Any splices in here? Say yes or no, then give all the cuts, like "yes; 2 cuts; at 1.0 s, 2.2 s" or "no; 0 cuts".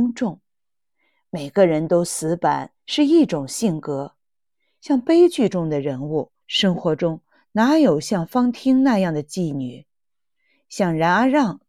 yes; 2 cuts; at 2.7 s, 6.4 s